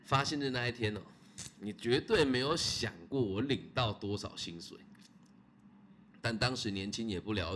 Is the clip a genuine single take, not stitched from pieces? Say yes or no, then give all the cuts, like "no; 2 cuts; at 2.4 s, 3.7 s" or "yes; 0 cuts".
yes; 0 cuts